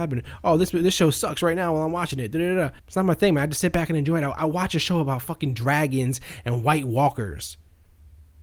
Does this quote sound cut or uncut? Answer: cut